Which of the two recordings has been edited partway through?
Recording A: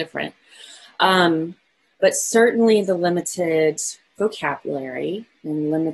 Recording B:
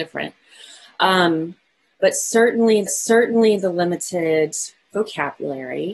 B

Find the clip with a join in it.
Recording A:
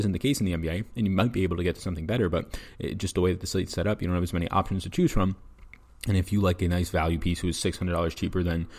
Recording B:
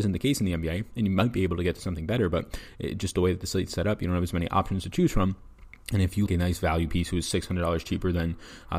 B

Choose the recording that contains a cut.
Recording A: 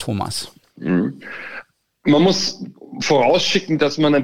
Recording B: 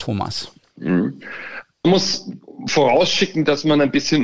B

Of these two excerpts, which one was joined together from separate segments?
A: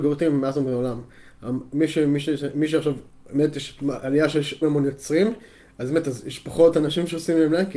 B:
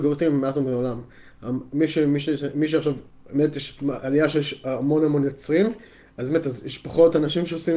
A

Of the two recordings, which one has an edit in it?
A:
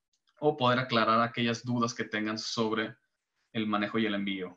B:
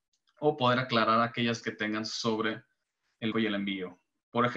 B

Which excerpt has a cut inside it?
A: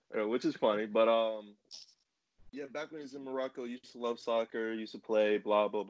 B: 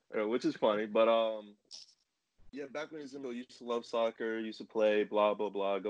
B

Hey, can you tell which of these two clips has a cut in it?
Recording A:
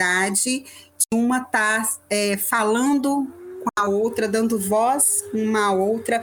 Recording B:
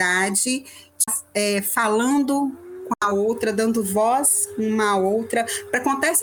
B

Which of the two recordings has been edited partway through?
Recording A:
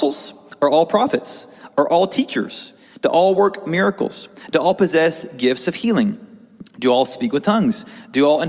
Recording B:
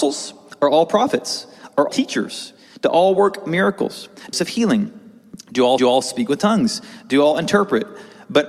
B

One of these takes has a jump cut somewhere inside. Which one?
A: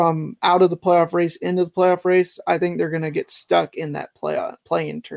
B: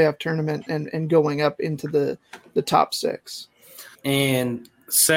B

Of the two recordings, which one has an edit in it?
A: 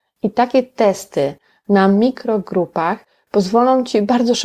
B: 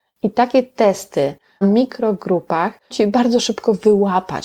B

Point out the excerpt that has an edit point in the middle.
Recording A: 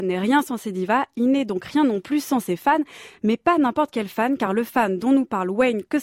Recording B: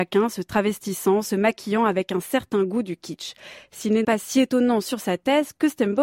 B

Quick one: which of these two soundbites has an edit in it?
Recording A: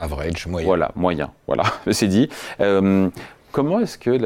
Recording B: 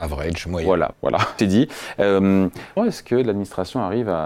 B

